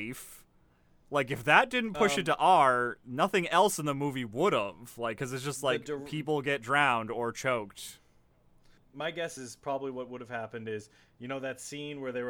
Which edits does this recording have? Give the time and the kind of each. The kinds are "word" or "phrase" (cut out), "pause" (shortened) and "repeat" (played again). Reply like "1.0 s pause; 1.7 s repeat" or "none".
9.4 s word

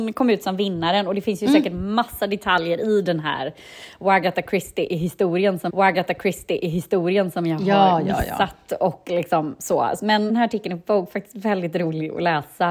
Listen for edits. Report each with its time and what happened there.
5.7 s repeat; 10.3 s phrase

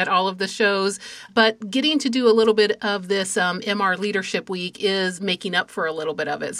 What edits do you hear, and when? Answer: 1.3 s word

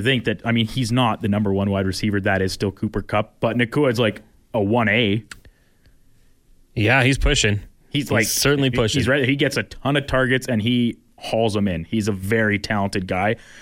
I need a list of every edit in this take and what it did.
none

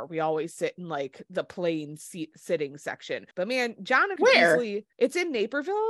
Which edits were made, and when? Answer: 3.3 s pause; 4.2 s word; 4.9 s pause

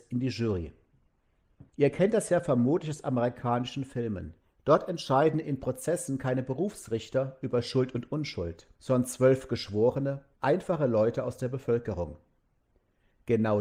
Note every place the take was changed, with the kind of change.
1.7 s pause; 4.4 s pause; 8.7 s pause; 10.3 s pause

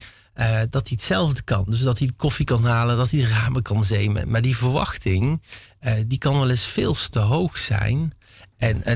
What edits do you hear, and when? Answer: none

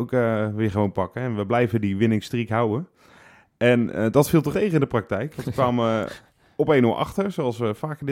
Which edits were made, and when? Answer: 4.5 s word

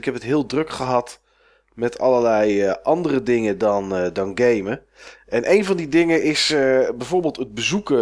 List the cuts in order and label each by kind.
none

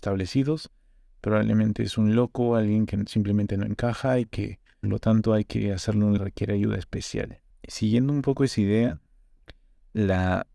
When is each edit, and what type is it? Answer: 4.8 s word; 6.2 s phrase; 7.5 s pause

